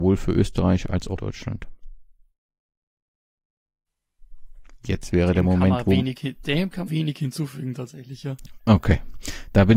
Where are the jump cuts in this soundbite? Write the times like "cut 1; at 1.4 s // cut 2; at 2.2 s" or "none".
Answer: cut 1; at 1.2 s // cut 2; at 6.9 s